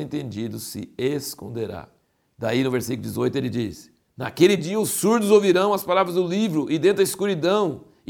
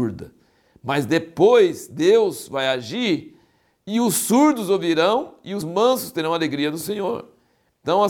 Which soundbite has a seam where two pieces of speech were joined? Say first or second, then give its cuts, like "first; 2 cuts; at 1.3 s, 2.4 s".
second; 1 cut; at 5.6 s